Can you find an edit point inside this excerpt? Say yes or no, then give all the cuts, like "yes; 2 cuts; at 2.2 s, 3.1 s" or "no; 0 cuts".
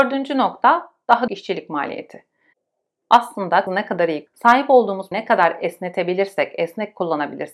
yes; 4 cuts; at 1.3 s, 3.7 s, 4.3 s, 5.1 s